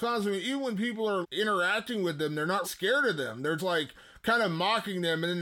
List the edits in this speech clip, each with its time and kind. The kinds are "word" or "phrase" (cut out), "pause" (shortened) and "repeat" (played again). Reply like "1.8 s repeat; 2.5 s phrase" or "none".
1.2 s word; 2.6 s word; 3.6 s word